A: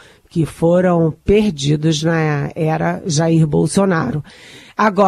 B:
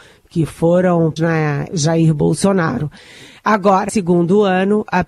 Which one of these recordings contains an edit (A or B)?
B